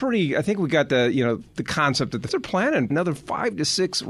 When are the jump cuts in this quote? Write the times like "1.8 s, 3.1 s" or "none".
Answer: 1.5 s, 2.3 s, 2.9 s